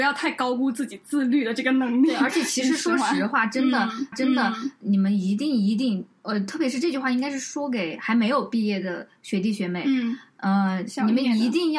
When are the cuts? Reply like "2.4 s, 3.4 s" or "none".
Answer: 4.1 s